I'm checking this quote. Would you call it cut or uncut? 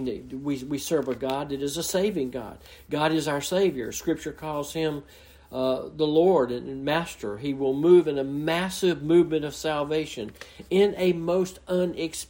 uncut